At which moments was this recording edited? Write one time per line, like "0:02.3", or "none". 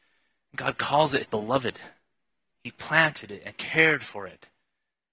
0:01.2
0:03.5